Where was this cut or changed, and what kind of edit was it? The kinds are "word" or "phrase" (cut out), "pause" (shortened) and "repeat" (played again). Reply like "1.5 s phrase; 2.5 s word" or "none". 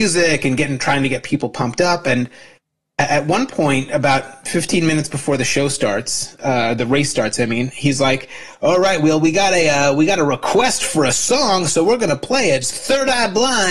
none